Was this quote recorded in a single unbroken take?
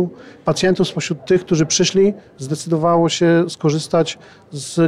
yes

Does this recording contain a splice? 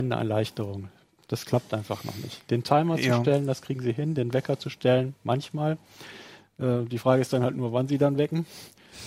no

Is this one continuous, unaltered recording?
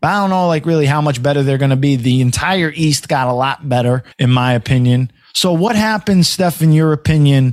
no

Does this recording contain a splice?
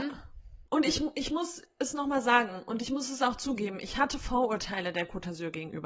no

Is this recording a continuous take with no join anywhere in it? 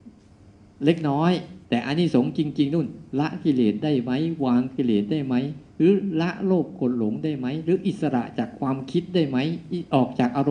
no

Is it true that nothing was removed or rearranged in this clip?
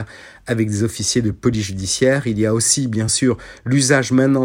yes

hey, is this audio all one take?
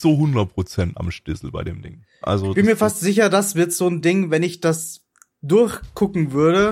yes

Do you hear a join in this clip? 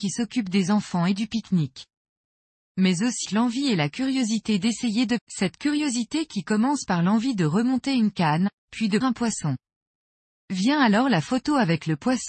yes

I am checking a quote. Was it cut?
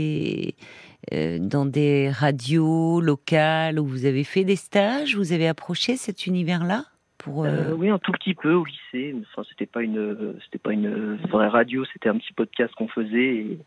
no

